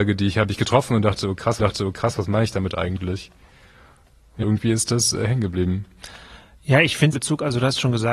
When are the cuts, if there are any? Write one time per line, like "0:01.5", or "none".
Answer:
0:01.6
0:04.4
0:07.1